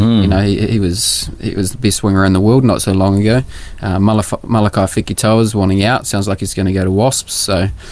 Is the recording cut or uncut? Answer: uncut